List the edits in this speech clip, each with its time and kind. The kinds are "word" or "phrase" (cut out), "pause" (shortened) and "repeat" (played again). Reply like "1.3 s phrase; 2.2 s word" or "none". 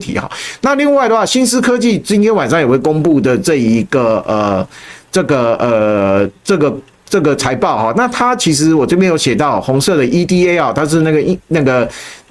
none